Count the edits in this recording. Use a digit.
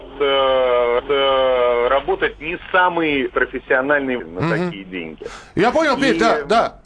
3